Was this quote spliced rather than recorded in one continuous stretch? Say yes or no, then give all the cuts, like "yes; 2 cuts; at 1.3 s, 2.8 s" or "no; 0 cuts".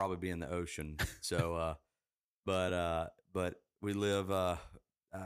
no; 0 cuts